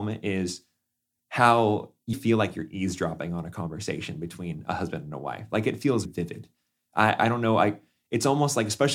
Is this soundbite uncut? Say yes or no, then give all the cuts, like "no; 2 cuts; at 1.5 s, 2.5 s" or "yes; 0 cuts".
no; 3 cuts; at 2.1 s, 6.1 s, 7.2 s